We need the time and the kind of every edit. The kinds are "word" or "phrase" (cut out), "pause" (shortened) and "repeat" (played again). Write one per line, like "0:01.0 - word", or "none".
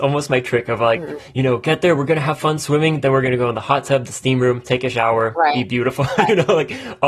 none